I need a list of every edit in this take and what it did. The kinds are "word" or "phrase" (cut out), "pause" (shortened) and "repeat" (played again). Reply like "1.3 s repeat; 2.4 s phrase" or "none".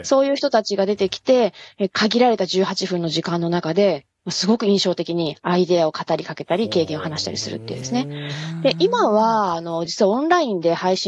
none